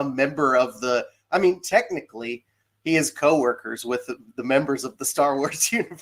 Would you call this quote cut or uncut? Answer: uncut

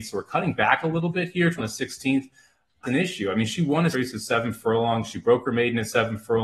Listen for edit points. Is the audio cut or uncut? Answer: cut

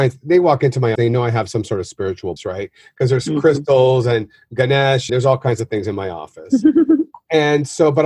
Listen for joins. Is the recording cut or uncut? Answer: cut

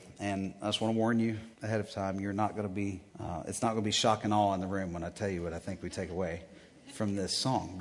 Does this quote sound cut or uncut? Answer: cut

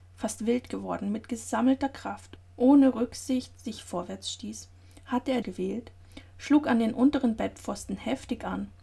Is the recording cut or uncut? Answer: cut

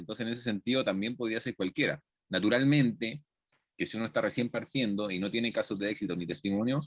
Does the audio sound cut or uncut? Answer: uncut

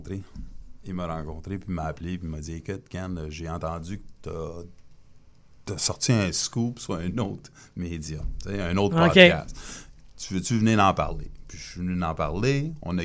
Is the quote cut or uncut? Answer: uncut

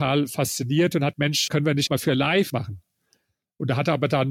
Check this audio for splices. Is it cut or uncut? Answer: cut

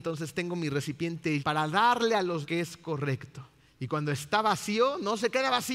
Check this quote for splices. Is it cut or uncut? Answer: cut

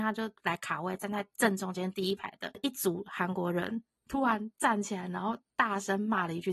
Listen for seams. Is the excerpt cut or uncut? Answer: cut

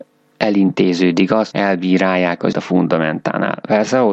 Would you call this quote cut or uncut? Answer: cut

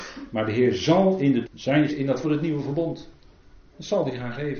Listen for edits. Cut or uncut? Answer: cut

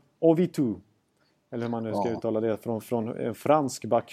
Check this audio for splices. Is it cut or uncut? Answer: uncut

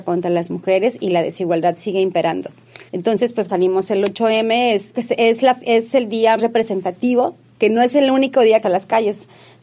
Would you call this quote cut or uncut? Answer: cut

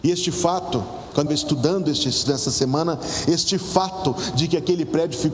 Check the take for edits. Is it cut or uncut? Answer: cut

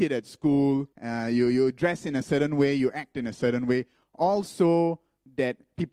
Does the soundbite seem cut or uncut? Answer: cut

